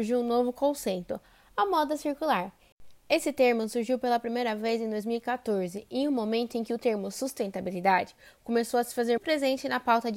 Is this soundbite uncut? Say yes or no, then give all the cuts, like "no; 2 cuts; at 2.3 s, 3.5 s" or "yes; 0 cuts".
no; 1 cut; at 9.2 s